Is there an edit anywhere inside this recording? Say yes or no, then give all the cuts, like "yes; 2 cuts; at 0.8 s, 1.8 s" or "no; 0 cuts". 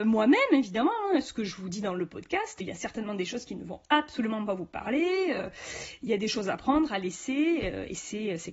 yes; 1 cut; at 2.6 s